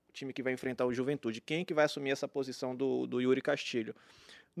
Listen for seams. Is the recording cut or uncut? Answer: uncut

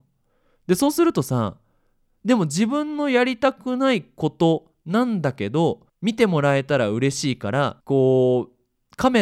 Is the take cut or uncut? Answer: cut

